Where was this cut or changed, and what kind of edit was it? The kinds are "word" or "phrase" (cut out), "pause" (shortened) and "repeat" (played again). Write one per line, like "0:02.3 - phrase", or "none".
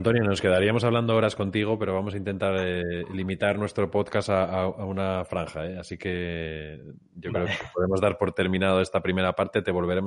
none